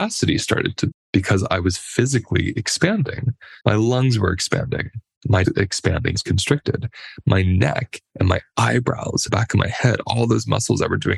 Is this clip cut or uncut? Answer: cut